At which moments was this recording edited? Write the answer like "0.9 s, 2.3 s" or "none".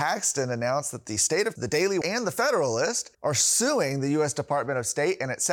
1.6 s, 2.0 s, 3.1 s